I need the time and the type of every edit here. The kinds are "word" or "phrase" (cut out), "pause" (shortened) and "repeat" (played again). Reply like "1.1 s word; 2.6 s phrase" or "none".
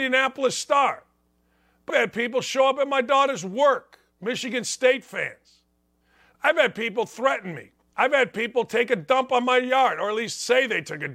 1.9 s word